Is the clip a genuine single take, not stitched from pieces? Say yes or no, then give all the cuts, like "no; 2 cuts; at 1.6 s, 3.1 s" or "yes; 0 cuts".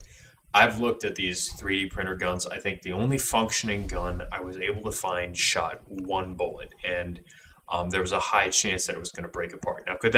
yes; 0 cuts